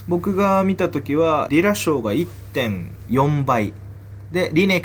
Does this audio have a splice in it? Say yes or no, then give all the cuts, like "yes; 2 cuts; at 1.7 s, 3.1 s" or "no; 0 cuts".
yes; 1 cut; at 1.5 s